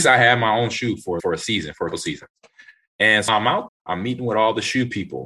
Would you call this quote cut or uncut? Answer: cut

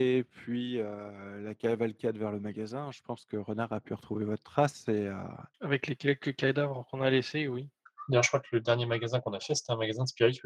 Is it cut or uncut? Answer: uncut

